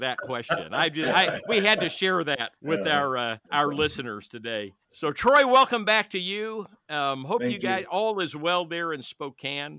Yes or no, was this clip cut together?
yes